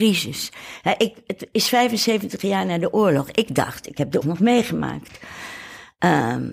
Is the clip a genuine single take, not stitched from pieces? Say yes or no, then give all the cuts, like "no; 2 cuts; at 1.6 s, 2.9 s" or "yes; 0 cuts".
no; 1 cut; at 4.2 s